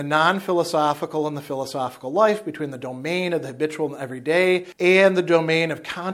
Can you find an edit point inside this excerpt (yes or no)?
no